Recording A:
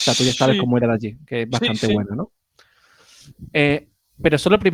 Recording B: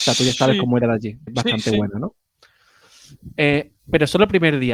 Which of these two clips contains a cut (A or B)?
B